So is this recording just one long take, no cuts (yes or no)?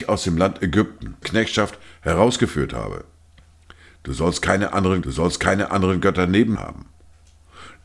no